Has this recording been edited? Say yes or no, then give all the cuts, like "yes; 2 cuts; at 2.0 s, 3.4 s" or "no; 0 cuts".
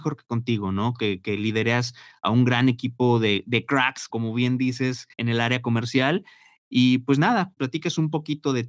yes; 3 cuts; at 4.1 s, 5.1 s, 7.6 s